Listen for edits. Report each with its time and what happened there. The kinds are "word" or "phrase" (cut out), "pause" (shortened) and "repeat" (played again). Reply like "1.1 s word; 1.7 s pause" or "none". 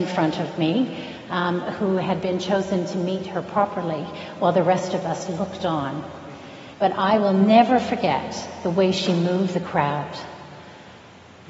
6.7 s pause; 9.5 s word